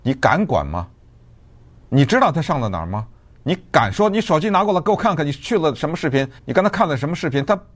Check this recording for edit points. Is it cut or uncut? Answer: cut